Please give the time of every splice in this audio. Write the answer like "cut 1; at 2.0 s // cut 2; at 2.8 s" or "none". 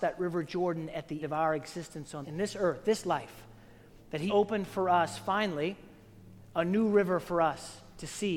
cut 1; at 1.2 s // cut 2; at 2.2 s // cut 3; at 4.3 s